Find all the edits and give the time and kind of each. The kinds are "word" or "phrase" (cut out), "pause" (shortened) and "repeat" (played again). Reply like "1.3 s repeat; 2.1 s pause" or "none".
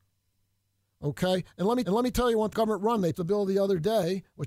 1.8 s repeat; 2.5 s word; 3.1 s word